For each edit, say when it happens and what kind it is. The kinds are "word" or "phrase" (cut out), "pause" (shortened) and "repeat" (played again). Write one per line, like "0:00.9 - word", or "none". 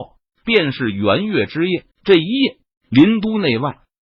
0:01.9 - pause